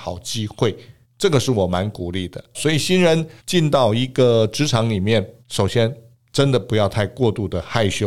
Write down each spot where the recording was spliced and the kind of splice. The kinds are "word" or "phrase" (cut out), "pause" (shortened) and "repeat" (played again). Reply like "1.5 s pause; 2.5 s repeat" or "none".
1.0 s pause; 2.5 s word; 3.4 s pause; 5.4 s pause; 6.1 s pause